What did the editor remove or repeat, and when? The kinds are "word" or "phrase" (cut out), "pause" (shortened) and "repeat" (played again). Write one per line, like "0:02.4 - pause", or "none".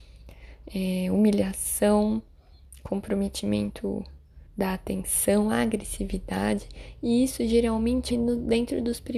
0:04.5 - pause
0:08.1 - word